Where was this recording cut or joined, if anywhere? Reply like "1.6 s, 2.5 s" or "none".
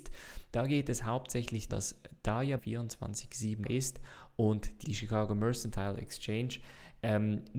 1.7 s, 2.6 s, 3.6 s, 4.8 s